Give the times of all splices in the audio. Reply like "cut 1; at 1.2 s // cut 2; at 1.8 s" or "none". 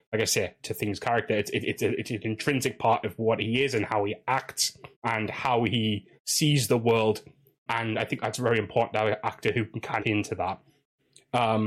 cut 1; at 4.9 s // cut 2; at 6.2 s // cut 3; at 7.7 s // cut 4; at 10.0 s